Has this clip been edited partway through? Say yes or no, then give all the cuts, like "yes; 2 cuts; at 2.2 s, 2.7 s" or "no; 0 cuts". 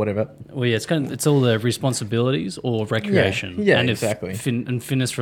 no; 0 cuts